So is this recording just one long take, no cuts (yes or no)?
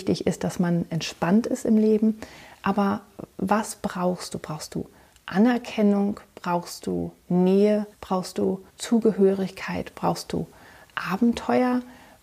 no